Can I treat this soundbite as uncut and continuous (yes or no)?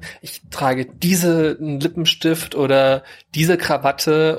yes